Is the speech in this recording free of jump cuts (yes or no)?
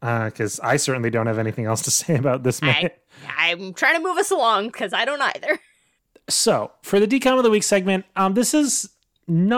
yes